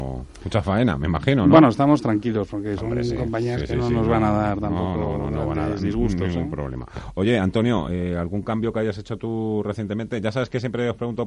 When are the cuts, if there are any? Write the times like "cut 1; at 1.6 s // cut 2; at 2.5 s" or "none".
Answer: none

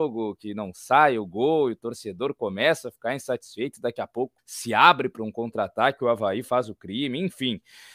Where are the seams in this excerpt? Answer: cut 1; at 4.4 s

